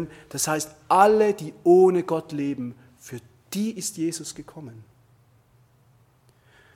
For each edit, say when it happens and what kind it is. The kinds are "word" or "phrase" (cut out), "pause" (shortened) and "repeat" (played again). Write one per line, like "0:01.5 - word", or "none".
none